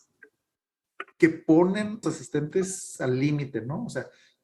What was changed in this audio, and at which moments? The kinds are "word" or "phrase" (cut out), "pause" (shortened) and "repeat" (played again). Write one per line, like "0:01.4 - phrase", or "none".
0:01.1 - pause
0:02.0 - phrase